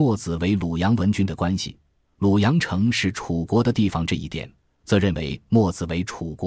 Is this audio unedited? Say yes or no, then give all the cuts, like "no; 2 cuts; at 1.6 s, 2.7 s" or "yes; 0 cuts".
yes; 0 cuts